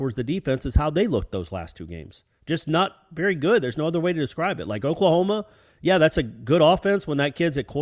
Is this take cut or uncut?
uncut